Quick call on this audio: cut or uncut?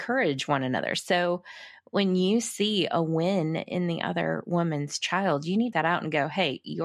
cut